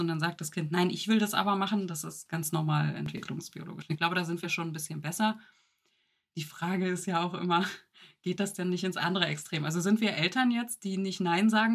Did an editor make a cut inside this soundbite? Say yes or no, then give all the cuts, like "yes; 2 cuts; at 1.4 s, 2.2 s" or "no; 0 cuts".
no; 0 cuts